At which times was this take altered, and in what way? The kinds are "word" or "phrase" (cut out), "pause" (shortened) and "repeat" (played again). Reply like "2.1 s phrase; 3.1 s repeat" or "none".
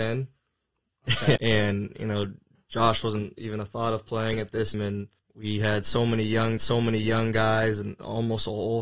1.4 s word; 4.7 s word; 5.2 s pause; 6.6 s repeat